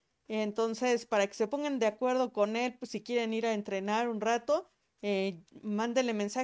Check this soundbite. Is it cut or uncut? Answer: uncut